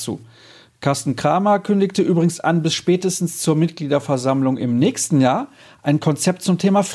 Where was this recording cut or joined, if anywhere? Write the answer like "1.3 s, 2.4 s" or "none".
none

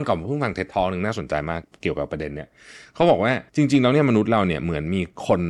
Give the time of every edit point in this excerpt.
3.5 s

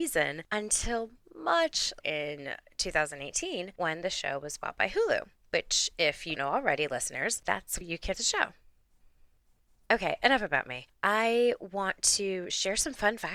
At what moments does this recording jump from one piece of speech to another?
2.0 s, 6.4 s, 7.8 s, 8.1 s

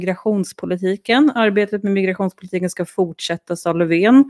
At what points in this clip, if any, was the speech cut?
none

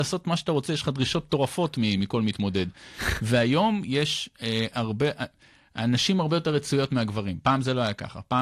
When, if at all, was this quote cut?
none

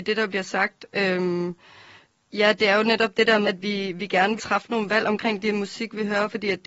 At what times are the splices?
3.4 s, 4.4 s

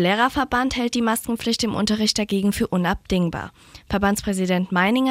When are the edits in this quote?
none

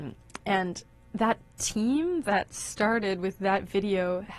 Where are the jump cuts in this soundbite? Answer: none

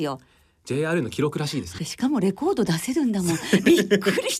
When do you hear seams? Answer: 1.8 s

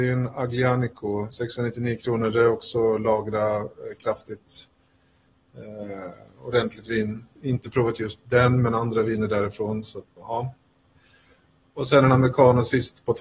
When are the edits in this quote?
7.4 s, 10.2 s

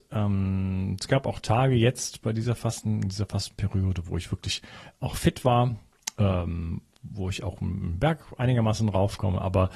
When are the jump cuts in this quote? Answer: none

